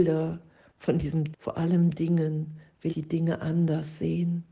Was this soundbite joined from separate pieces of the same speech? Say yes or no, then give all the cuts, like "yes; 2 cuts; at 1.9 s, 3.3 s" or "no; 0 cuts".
yes; 2 cuts; at 1.3 s, 2.9 s